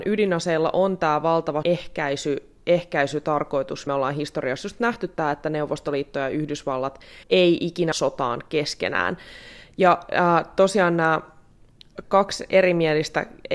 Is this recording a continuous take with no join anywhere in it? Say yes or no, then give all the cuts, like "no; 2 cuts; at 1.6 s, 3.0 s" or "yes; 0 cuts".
no; 5 cuts; at 1.6 s, 3.9 s, 7.2 s, 7.9 s, 12.0 s